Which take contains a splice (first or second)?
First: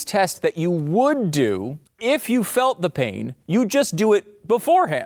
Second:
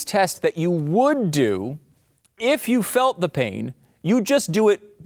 first